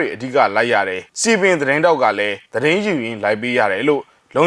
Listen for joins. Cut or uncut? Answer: cut